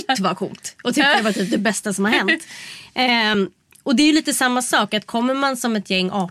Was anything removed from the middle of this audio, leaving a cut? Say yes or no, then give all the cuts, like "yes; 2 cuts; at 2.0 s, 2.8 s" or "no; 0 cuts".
no; 0 cuts